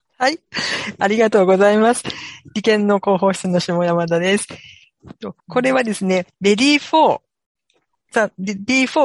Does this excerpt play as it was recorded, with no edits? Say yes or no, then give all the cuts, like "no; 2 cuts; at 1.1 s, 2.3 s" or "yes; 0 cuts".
no; 2 cuts; at 5.4 s, 6.3 s